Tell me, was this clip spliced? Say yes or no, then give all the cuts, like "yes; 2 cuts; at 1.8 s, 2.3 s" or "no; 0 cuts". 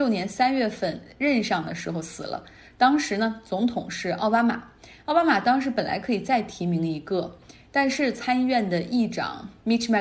no; 0 cuts